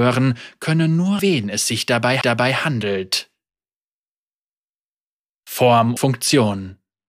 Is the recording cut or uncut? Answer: cut